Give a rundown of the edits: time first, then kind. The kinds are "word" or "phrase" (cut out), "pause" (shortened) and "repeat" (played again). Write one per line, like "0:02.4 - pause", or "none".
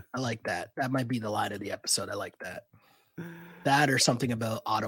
none